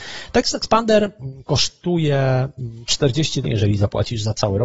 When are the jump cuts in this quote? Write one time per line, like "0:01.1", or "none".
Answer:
0:03.4